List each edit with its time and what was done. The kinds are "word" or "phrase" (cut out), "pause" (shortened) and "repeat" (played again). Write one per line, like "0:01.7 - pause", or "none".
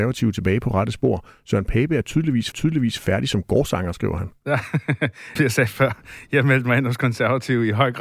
0:02.5 - repeat
0:05.4 - word